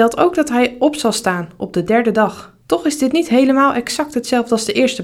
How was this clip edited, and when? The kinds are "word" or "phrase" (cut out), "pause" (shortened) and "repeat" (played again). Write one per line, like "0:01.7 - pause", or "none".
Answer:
0:02.6 - pause